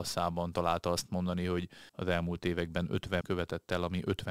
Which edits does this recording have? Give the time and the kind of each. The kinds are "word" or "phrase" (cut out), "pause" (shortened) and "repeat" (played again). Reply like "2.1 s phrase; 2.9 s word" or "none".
1.9 s pause; 3.2 s word

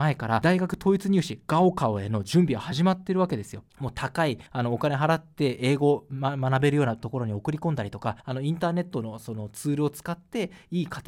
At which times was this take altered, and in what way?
3.7 s pause; 4.5 s pause; 8.2 s pause

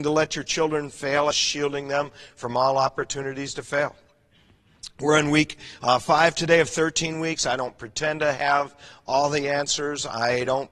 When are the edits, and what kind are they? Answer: 1.3 s phrase

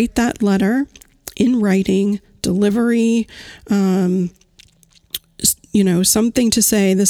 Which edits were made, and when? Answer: none

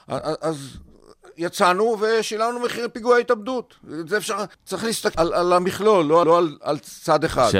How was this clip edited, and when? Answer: 4.5 s pause; 5.1 s word; 6.2 s repeat

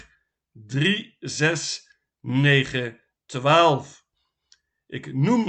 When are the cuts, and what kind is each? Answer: 3.2 s word

